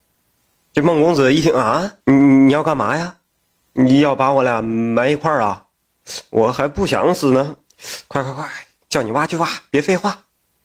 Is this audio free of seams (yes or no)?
no